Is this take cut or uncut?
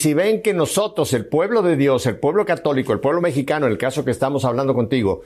uncut